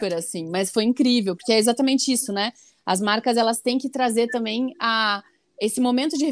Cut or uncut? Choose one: uncut